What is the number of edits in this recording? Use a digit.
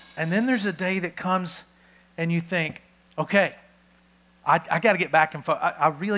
0